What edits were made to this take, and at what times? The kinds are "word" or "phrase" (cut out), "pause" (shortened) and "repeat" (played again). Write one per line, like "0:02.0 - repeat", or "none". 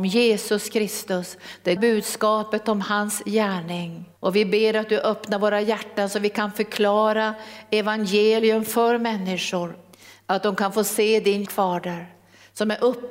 0:01.8 - word
0:04.2 - pause
0:09.9 - pause
0:11.5 - word